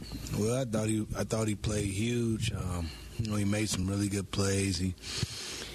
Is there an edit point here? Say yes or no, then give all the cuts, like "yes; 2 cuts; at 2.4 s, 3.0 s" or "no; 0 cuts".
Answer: no; 0 cuts